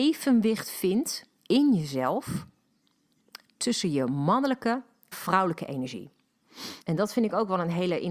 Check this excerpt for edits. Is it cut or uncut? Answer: cut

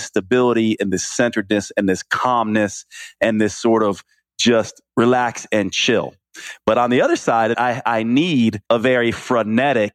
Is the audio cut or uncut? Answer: cut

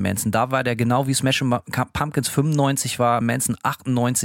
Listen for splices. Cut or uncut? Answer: cut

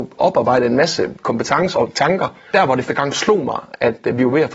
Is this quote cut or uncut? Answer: cut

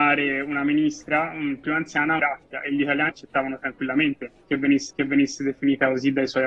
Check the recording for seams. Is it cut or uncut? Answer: cut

